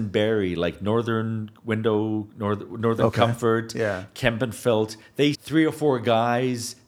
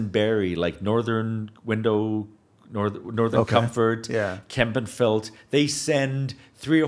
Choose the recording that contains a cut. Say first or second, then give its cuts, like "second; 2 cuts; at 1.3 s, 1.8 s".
first; 2 cuts; at 2.3 s, 5.3 s